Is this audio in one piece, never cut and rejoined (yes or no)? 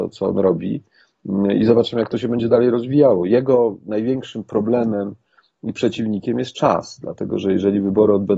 yes